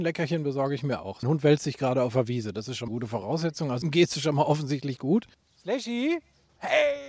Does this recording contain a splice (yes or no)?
yes